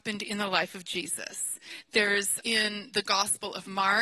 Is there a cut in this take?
yes; 1 cut; at 2.4 s

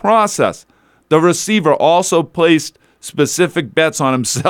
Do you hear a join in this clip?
no; 0 cuts

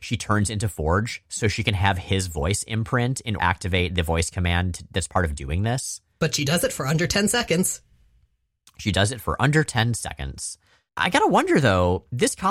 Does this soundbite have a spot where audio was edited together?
yes; 1 cut; at 3.4 s

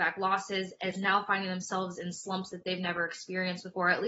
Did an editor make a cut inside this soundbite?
no; 0 cuts

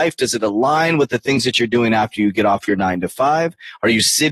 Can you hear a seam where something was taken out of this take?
no; 0 cuts

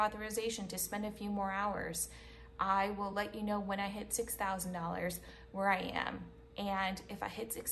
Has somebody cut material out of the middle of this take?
no; 0 cuts

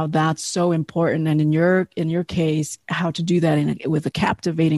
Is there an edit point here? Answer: no; 0 cuts

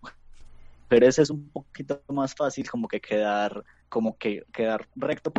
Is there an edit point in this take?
yes; 1 cut; at 3.8 s

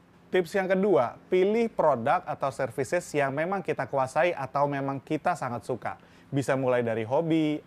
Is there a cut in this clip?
no; 0 cuts

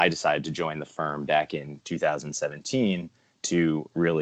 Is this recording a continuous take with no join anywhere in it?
yes; 0 cuts

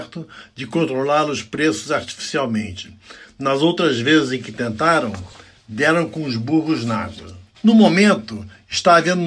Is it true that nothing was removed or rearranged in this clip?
yes; 0 cuts

